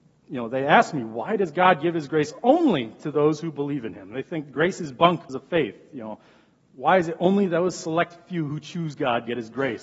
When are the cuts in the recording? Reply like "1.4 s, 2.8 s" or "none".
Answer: 5.3 s

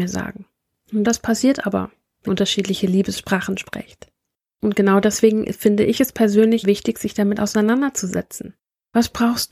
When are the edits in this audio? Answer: 1.0 s, 2.3 s, 6.6 s

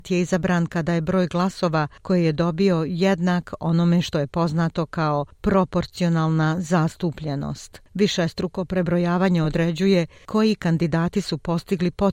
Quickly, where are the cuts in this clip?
none

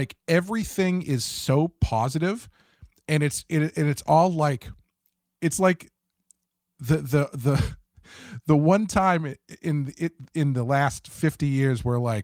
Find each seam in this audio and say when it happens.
none

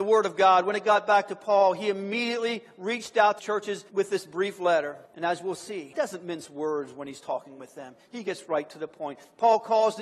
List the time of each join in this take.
3.4 s, 5.1 s

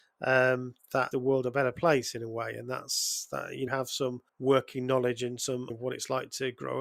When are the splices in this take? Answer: 1.1 s, 3.7 s, 4.3 s, 5.7 s

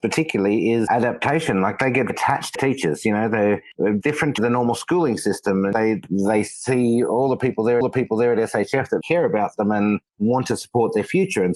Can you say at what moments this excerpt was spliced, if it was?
2.1 s, 2.5 s, 4.0 s, 4.4 s, 6.0 s, 7.8 s, 9.0 s, 10.1 s

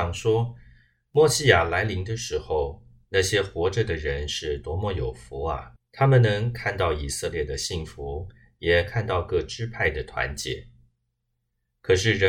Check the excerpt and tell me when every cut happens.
5.8 s

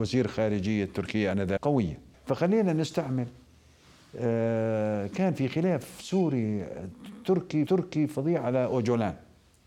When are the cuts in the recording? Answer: 1.6 s, 2.1 s, 7.7 s

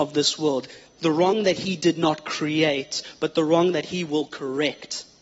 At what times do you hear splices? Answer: none

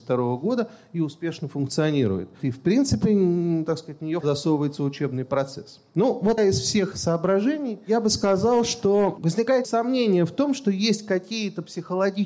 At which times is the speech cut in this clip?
4.2 s, 6.4 s, 6.9 s, 9.6 s

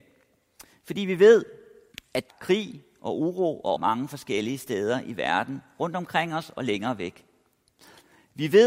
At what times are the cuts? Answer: 1.9 s, 2.3 s, 3.7 s

